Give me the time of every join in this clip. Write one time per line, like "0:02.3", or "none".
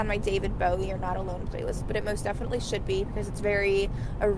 none